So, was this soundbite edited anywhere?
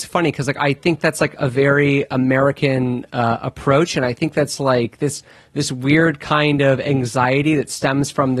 no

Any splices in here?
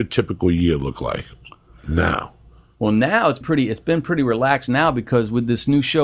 yes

